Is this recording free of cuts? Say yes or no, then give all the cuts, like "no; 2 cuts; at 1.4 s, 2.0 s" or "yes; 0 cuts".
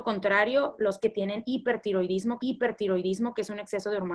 no; 2 cuts; at 1.0 s, 2.4 s